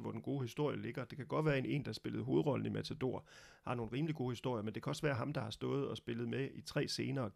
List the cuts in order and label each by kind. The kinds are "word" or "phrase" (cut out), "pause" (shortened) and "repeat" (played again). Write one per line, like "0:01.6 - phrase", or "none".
none